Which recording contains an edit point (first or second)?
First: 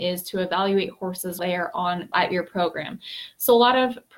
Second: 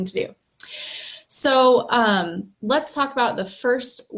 first